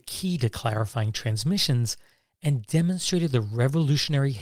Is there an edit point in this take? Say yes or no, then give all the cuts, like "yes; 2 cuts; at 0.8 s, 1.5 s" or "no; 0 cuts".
no; 0 cuts